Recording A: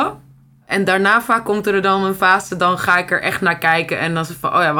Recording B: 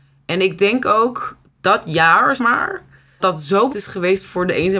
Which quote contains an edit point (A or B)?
B